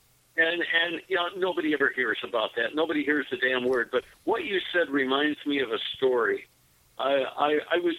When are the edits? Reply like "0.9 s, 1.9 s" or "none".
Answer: none